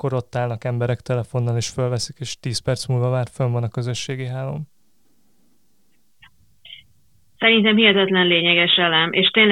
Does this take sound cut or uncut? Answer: uncut